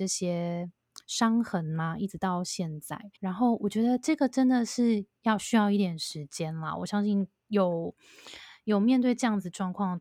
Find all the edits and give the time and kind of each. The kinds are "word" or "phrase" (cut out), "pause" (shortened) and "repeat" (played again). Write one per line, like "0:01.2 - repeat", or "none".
0:03.2 - pause